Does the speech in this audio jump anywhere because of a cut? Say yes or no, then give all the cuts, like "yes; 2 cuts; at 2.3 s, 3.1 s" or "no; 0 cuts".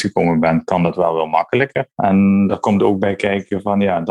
yes; 1 cut; at 1.9 s